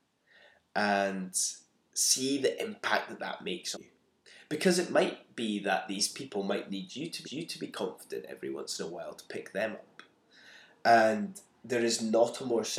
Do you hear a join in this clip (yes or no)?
yes